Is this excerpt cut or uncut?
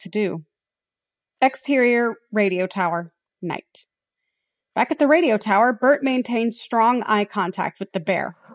uncut